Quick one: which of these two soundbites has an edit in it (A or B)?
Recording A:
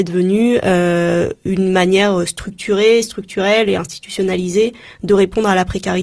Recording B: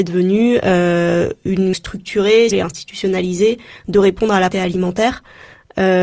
B